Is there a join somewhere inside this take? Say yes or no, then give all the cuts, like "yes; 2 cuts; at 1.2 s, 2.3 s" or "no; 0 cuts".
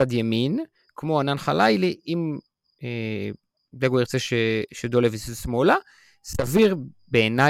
no; 0 cuts